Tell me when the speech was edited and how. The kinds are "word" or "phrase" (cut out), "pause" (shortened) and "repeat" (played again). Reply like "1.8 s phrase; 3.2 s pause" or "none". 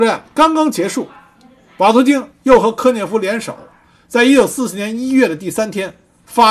none